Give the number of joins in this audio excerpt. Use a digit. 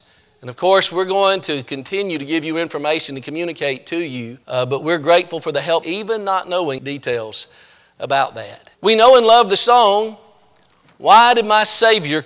4